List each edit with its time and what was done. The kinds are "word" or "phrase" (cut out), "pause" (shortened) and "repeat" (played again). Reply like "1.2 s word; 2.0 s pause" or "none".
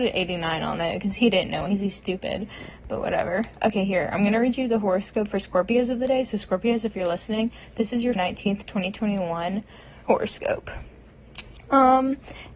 1.7 s word; 8.2 s word; 10.0 s word